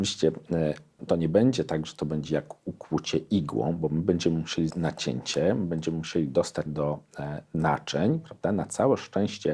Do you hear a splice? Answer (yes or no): yes